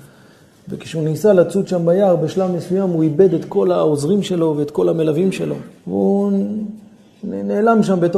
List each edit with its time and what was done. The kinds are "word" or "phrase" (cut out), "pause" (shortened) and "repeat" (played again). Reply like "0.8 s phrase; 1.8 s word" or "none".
5.8 s pause